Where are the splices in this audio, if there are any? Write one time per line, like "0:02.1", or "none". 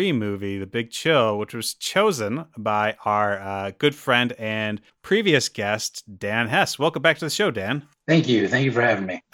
none